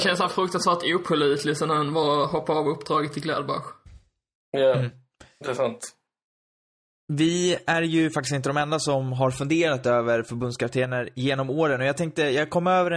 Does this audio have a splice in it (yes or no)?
no